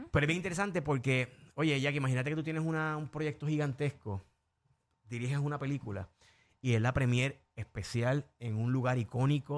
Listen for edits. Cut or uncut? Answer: uncut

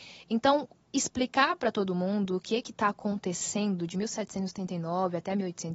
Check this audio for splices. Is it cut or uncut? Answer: uncut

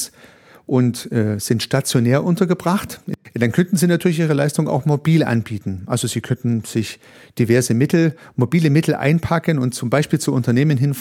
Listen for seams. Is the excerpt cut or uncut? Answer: uncut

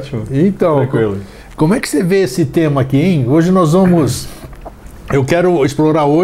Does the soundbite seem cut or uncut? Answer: uncut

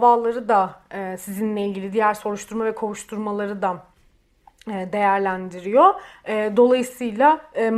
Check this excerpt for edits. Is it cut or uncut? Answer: uncut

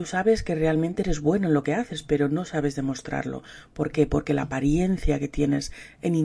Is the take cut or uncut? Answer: uncut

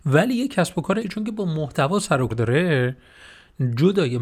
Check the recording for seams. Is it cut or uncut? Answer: cut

